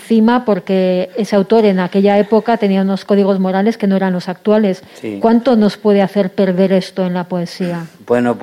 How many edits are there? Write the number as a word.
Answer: one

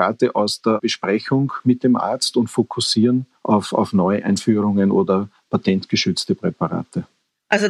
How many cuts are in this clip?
one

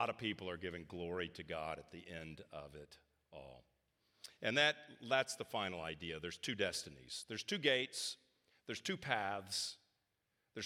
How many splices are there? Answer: zero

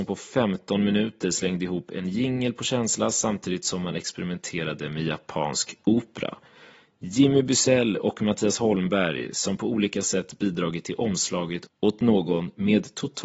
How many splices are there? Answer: zero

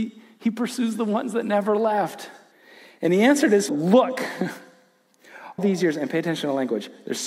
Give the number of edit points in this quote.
three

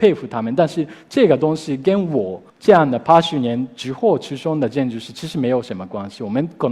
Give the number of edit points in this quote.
one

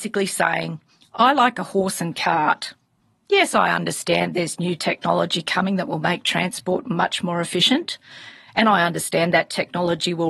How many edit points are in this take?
zero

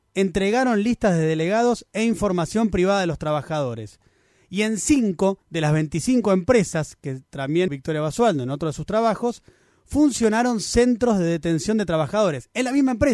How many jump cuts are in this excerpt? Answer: two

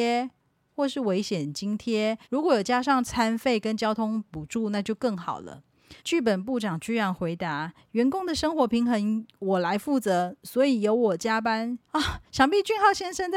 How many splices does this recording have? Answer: four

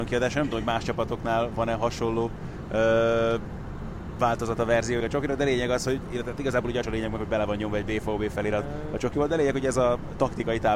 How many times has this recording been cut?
two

